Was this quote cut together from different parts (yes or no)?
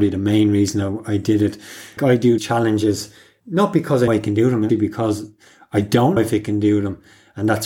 yes